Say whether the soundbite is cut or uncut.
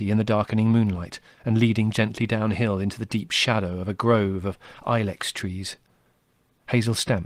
uncut